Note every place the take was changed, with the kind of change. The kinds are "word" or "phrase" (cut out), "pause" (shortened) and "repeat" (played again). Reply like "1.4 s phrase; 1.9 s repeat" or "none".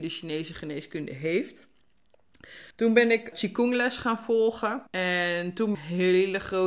2.7 s pause; 3.3 s word; 4.9 s pause; 5.7 s phrase